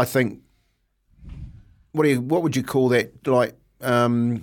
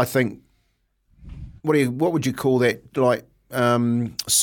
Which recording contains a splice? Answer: second; 1 cut; at 1.6 s

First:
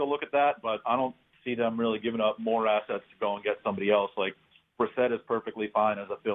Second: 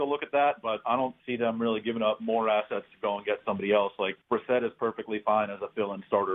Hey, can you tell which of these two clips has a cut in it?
second; 2 cuts; at 1.2 s, 4.2 s

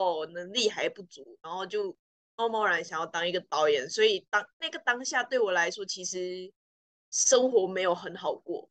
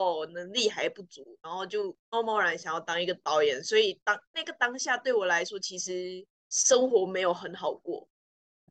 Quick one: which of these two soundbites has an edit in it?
second; 2 cuts; at 2.0 s, 6.3 s

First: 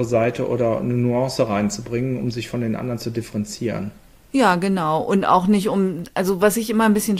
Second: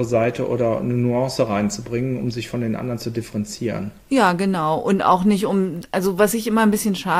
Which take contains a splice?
second; 1 cut; at 4.0 s

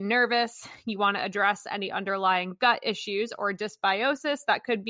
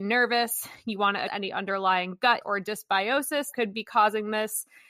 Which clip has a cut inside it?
second; 3 cuts; at 1.3 s, 2.4 s, 3.5 s

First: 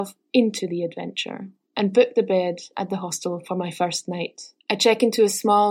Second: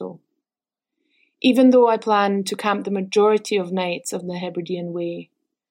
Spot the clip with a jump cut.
first; 1 cut; at 4.6 s

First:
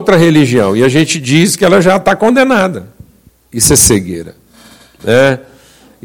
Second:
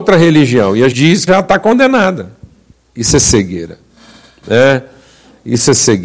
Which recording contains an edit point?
second; 2 cuts; at 0.9 s, 1.3 s

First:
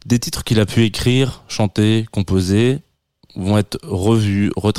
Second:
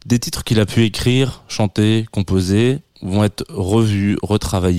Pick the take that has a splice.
second; 1 cut; at 2.9 s

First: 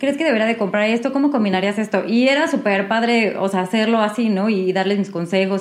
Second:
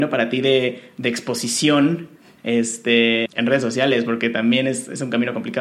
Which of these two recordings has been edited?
second; 1 cut; at 3.3 s

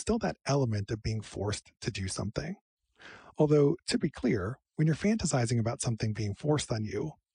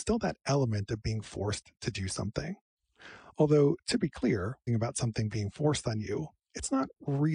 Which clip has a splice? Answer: second; 1 cut; at 4.7 s

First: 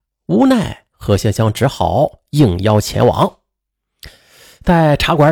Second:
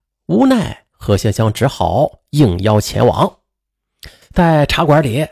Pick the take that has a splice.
second; 1 cut; at 4.2 s

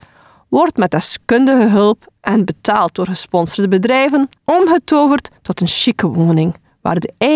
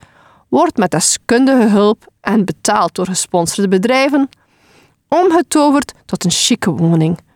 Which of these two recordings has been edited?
first; 1 cut; at 4.4 s

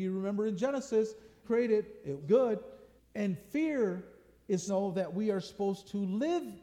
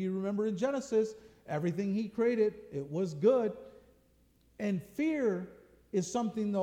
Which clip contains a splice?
first; 4 cuts; at 1.4 s, 2.2 s, 3.0 s, 4.7 s

